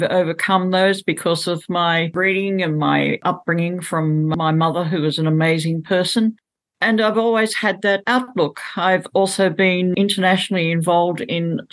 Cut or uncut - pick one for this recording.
uncut